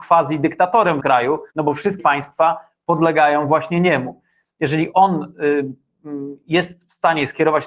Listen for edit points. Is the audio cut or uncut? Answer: cut